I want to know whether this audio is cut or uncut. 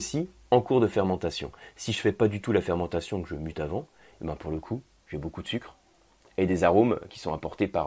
uncut